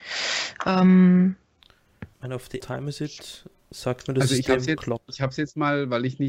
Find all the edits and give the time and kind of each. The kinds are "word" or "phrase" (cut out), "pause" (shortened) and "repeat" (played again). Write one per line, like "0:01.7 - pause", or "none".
0:02.1 - pause
0:02.6 - phrase